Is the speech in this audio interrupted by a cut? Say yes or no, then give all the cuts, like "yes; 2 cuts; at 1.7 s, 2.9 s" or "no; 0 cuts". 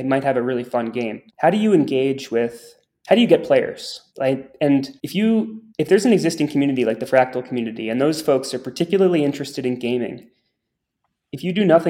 yes; 4 cuts; at 1.3 s, 4.1 s, 5.0 s, 5.7 s